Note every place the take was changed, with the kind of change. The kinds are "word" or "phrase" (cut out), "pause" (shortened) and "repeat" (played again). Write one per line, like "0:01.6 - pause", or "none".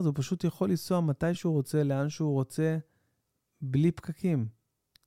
none